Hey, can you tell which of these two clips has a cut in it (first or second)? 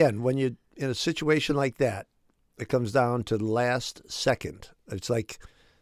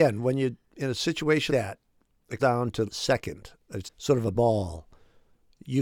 second